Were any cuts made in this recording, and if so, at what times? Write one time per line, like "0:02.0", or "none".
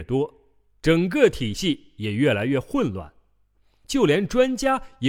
none

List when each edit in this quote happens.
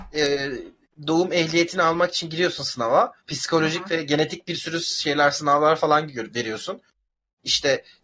0:03.2

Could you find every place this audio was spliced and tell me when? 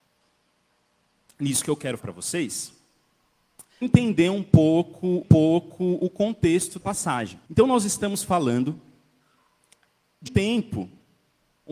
0:02.0
0:03.8
0:05.2
0:06.8
0:07.4
0:10.3

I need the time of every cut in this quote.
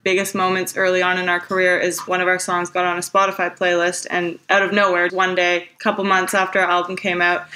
0:02.1
0:05.1

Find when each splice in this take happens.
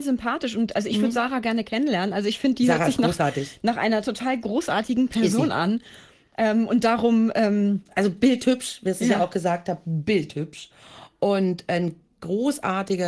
none

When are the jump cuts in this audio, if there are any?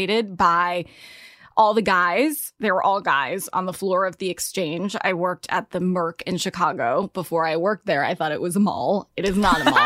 none

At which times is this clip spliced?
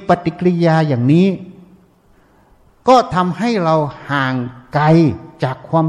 none

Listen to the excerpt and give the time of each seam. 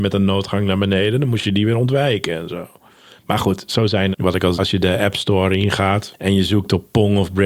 0:04.1
0:04.5

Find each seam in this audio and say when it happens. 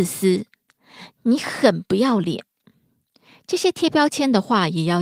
none

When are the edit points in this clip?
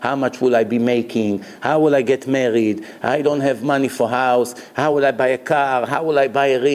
none

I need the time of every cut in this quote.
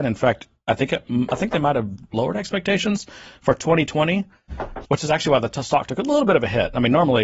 0:04.8

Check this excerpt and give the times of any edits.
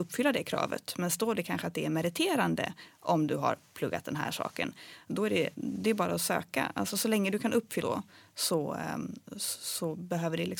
0:07.8

